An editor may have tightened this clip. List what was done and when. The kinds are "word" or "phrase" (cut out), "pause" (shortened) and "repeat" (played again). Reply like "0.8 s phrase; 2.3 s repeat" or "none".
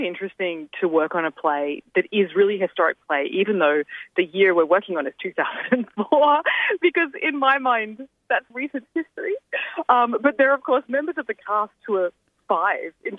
8.5 s word